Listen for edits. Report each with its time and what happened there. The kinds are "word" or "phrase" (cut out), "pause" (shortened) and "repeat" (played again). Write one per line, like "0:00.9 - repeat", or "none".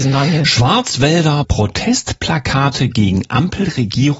0:01.4 - word